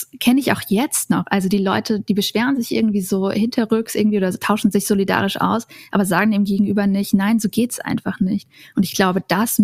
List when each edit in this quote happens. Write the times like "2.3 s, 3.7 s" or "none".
none